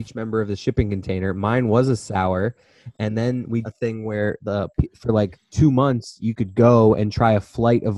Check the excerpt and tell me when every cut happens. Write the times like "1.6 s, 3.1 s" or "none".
3.6 s